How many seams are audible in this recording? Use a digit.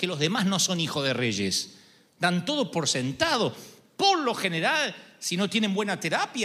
0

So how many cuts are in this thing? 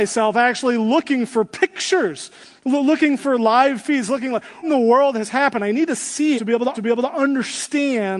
3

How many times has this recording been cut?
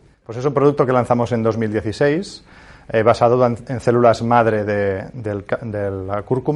0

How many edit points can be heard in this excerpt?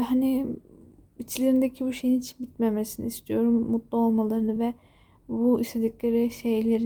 0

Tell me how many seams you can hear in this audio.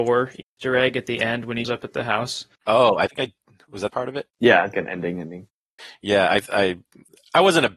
6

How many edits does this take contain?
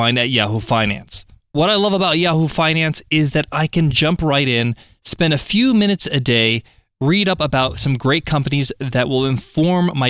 0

